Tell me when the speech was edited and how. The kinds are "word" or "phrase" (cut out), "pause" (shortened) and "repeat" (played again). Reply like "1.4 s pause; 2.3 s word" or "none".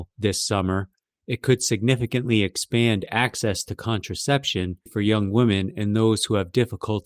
4.9 s word